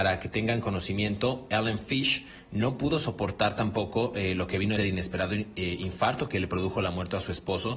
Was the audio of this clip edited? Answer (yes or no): yes